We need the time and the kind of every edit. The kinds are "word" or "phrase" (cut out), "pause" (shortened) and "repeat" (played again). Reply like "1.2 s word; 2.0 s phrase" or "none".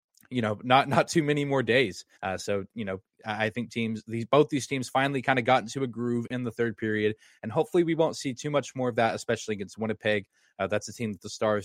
2.1 s pause